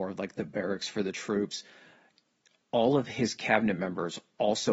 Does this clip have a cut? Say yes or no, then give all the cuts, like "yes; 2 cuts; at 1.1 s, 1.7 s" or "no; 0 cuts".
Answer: no; 0 cuts